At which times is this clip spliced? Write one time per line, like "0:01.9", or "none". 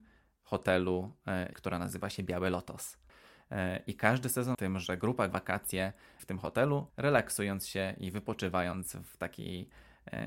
0:01.5
0:04.5
0:05.3
0:06.2
0:06.9

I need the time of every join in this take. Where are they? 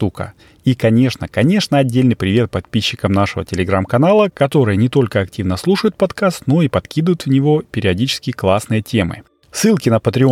none

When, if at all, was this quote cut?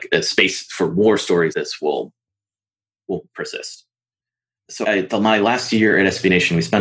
0:01.5
0:04.8

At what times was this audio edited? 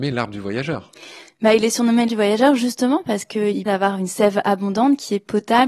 0:02.1
0:03.7

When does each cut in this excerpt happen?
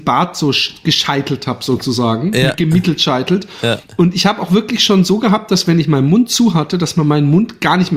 none

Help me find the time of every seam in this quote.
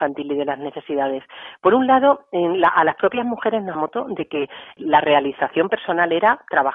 0:03.7
0:04.8

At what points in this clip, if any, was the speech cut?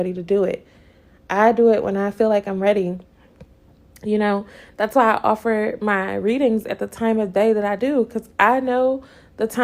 none

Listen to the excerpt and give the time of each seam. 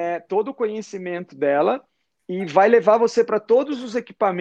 none

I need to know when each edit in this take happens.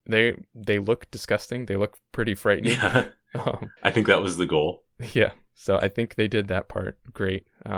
0:03.8

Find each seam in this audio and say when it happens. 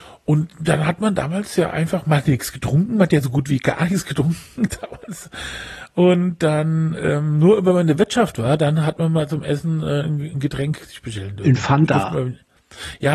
none

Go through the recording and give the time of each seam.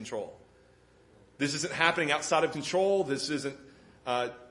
0:02.5

